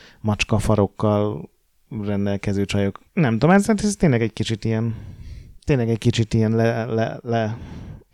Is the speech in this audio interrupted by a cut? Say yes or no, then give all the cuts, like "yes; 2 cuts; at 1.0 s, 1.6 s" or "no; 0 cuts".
yes; 2 cuts; at 3.1 s, 5.6 s